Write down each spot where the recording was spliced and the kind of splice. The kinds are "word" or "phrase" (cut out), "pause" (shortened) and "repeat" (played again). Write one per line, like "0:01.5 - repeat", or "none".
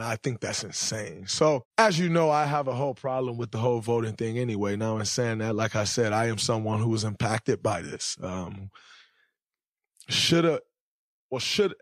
0:01.7 - pause